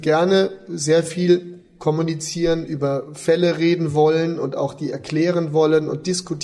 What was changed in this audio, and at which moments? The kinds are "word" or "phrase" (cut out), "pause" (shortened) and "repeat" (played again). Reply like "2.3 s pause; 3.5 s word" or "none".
none